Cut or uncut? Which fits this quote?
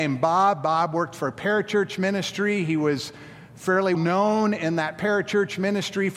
cut